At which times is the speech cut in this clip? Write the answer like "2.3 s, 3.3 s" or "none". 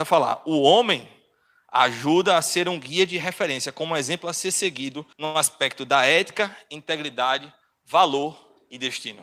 5.1 s